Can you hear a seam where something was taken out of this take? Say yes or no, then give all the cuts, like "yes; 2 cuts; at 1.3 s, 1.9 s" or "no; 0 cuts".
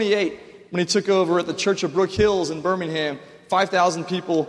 no; 0 cuts